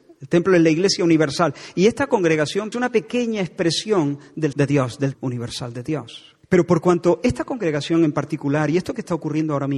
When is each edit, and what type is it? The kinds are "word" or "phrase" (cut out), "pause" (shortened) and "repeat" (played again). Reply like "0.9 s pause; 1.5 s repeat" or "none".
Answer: 2.7 s phrase; 4.5 s word; 5.1 s word; 6.4 s pause